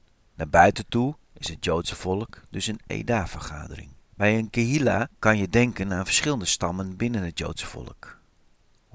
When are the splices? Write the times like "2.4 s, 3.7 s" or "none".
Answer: 4.0 s